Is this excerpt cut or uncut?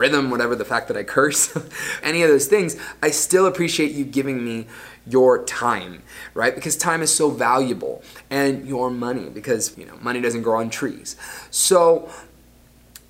cut